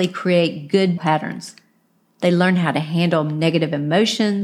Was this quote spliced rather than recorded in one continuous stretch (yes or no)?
yes